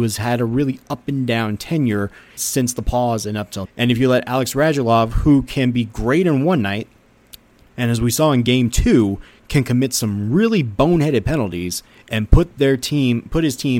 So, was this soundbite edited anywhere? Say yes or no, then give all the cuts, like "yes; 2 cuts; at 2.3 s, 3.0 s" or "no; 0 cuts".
yes; 2 cuts; at 2.4 s, 3.6 s